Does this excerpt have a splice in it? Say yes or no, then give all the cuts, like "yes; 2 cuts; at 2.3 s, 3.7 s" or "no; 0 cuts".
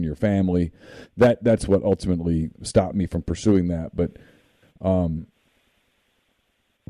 no; 0 cuts